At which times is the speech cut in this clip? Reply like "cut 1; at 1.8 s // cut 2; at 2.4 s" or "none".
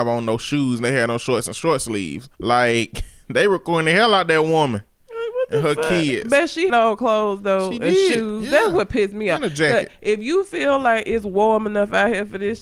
cut 1; at 2.3 s // cut 2; at 6.7 s